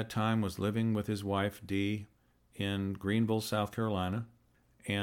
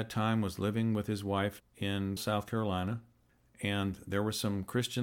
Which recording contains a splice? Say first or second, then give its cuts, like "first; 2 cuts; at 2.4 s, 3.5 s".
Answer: second; 2 cuts; at 1.6 s, 2.2 s